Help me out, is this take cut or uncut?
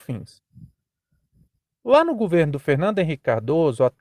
uncut